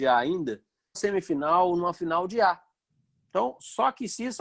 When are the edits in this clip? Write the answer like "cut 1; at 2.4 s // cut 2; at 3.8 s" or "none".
cut 1; at 0.9 s